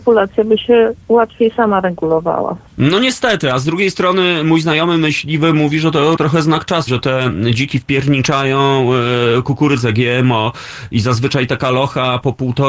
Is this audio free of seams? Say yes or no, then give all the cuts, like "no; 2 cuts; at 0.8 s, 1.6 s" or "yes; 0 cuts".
no; 3 cuts; at 2.7 s, 6.2 s, 6.9 s